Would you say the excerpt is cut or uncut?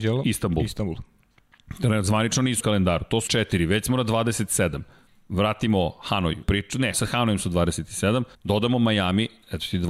cut